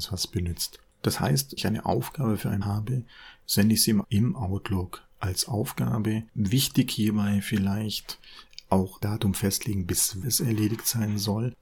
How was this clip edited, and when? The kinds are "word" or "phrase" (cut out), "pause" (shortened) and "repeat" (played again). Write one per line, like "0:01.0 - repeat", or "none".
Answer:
0:01.6 - word
0:02.6 - word
0:04.0 - word
0:09.0 - word
0:10.2 - word